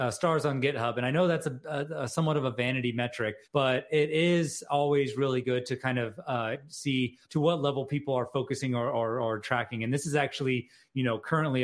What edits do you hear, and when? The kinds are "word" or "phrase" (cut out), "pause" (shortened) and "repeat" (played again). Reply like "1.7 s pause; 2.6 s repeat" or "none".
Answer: 3.4 s pause; 7.2 s pause